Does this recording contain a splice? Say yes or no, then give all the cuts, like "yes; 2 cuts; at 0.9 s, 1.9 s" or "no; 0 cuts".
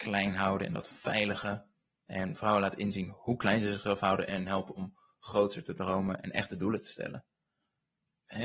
no; 0 cuts